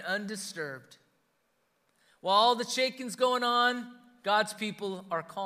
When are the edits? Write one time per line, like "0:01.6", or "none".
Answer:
none